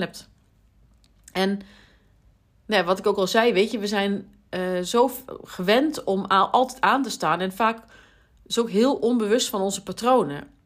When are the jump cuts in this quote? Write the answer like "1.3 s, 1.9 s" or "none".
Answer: none